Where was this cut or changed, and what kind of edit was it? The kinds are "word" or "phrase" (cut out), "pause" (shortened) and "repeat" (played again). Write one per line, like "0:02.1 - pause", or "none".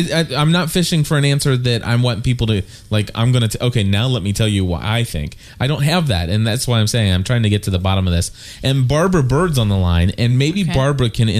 none